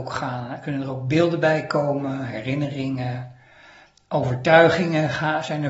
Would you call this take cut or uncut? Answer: uncut